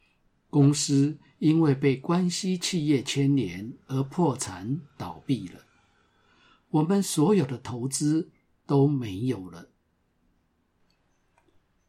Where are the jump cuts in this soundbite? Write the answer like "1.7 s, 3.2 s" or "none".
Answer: none